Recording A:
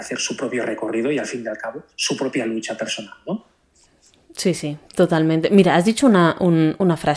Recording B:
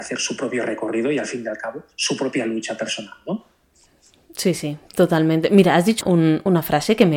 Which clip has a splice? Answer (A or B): B